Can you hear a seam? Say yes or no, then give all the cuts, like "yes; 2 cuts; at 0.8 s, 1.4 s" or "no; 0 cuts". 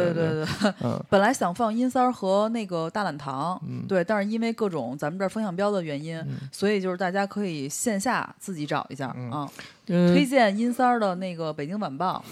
no; 0 cuts